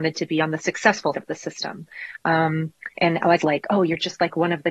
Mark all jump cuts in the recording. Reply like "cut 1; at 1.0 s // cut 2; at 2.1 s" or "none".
cut 1; at 1.1 s // cut 2; at 2.9 s // cut 3; at 3.4 s